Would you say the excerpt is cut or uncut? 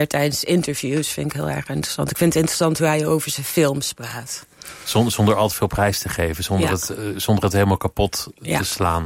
uncut